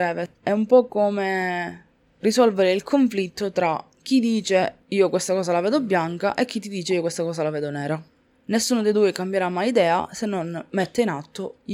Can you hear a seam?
no; 0 cuts

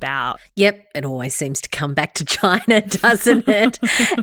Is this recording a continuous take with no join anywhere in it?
yes; 0 cuts

